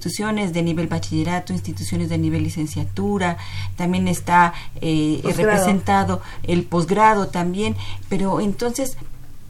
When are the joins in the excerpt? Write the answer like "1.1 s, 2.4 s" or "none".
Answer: none